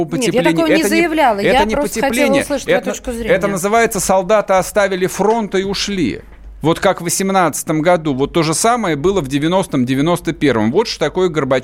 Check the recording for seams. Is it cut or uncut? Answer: uncut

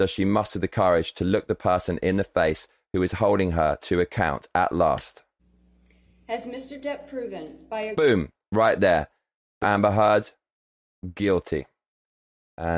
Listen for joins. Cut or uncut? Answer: cut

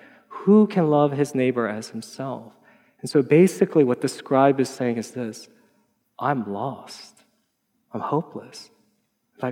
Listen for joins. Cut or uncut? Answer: uncut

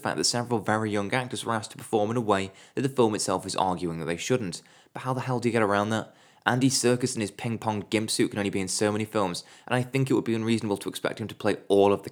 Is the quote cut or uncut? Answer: uncut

